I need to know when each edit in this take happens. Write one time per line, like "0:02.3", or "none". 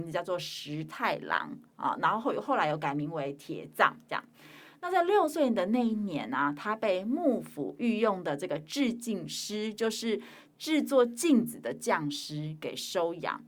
none

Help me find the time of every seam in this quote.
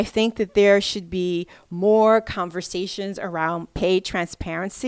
none

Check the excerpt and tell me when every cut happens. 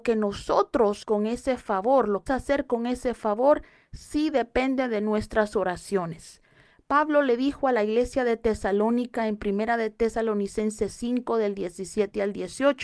0:01.0
0:02.3

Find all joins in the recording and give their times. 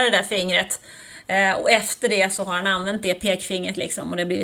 none

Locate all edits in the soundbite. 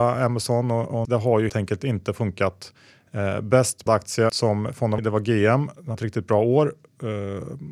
0:01.0
0:01.5
0:03.9
0:04.3
0:05.0
0:05.9

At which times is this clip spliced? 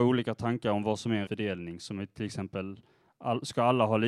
0:01.3

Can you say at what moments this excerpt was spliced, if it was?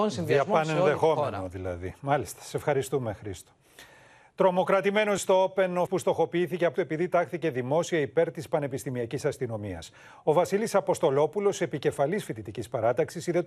0:05.2
0:05.9
0:06.7

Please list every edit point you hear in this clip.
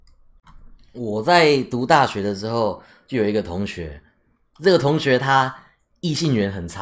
none

